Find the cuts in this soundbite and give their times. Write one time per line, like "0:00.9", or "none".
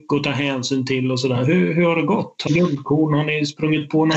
0:02.5